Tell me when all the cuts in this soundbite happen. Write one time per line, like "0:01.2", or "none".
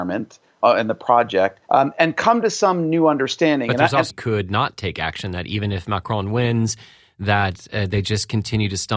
0:01.6
0:04.1

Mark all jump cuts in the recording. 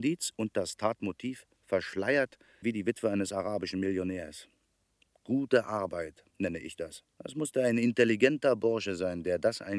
0:02.6
0:06.3
0:07.1

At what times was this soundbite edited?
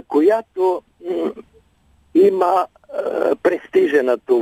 none

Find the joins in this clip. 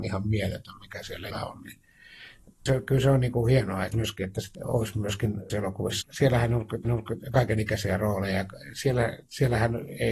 0:01.3
0:02.7
0:03.9
0:04.5
0:05.5
0:06.0
0:06.8

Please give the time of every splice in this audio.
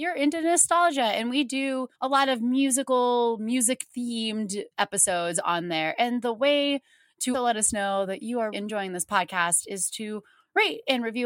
0:01.9
0:04.7
0:07.3
0:08.5

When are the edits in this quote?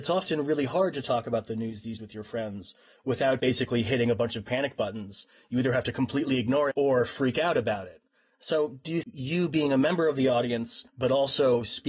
0:02.0
0:03.4
0:06.7
0:09.0
0:10.9

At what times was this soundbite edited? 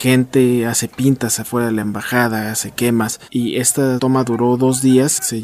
none

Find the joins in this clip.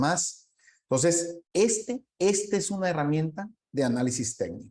0:01.4

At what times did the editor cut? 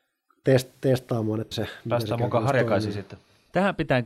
0:01.5

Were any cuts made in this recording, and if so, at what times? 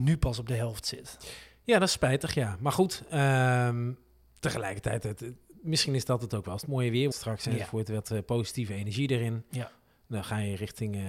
0:07.1

